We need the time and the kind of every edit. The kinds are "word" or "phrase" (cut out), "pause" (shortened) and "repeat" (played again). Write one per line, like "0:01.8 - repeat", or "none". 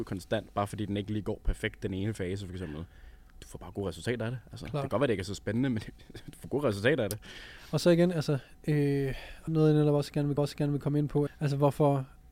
0:09.5 - word
0:10.4 - repeat
0:11.3 - word